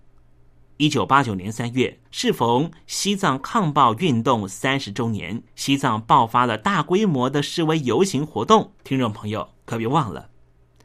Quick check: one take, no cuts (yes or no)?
no